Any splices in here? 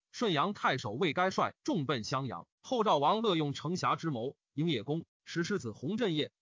yes; 1 cut; at 2.5 s

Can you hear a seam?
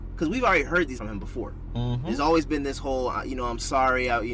yes; 1 cut; at 1.0 s

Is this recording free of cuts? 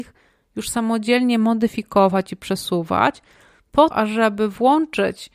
no; 1 cut; at 3.9 s

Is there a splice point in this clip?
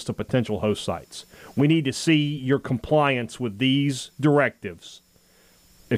no; 0 cuts

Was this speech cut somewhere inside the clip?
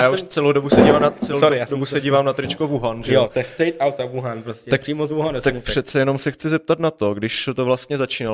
no; 0 cuts

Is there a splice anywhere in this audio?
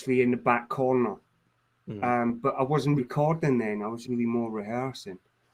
yes; 2 cuts; at 3.0 s, 4.0 s

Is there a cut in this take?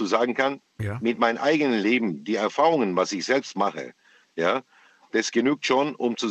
no; 0 cuts

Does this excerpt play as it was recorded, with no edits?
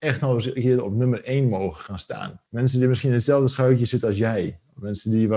no; 1 cut; at 2.5 s

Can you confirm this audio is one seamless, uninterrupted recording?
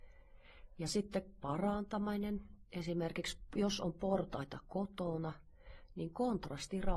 no; 1 cut; at 1.4 s

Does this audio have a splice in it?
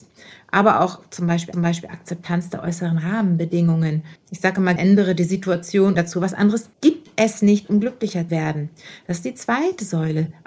yes; 6 cuts; at 1.5 s, 4.2 s, 4.8 s, 6.0 s, 6.7 s, 8.3 s

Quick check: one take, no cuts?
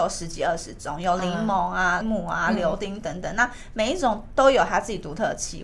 no; 1 cut; at 2.0 s

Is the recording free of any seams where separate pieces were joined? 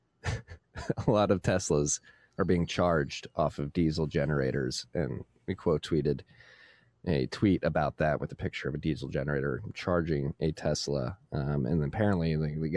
yes; 0 cuts

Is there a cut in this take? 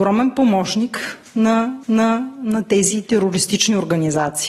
yes; 1 cut; at 1.8 s

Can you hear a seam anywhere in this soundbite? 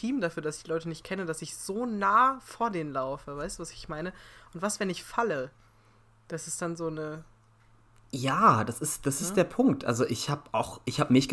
no; 0 cuts

